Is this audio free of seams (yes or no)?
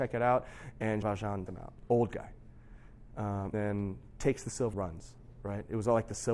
no